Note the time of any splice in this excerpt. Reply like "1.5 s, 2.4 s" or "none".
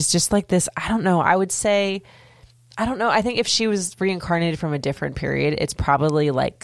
none